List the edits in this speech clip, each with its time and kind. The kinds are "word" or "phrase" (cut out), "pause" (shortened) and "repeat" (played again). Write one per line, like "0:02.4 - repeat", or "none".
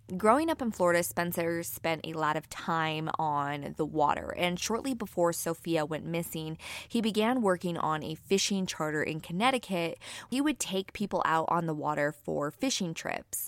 0:10.3 - word